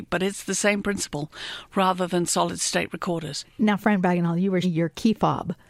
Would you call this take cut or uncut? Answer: cut